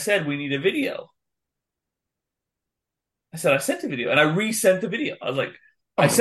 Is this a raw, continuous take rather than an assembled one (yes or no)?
yes